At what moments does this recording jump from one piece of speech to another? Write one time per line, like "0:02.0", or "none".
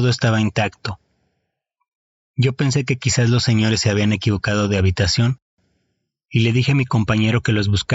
none